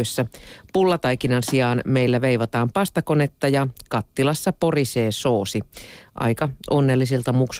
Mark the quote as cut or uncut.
uncut